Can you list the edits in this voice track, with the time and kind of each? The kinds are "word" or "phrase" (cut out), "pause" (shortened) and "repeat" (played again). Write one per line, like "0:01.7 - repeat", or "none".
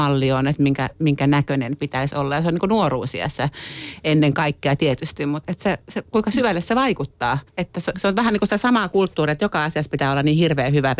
0:05.4 - word
0:07.5 - pause
0:07.9 - word